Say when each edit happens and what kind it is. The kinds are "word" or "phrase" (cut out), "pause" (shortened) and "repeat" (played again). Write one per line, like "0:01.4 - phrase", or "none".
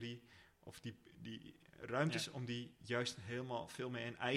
none